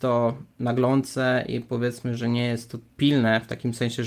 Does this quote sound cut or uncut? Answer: cut